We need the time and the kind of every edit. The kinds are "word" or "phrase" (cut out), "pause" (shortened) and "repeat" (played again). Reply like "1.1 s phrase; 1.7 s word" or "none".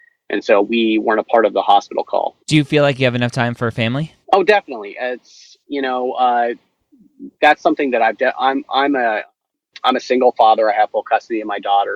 2.4 s pause; 4.2 s pause; 5.6 s pause; 7.3 s pause